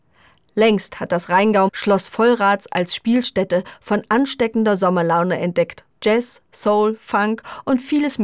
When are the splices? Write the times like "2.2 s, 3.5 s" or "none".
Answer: 1.7 s, 5.9 s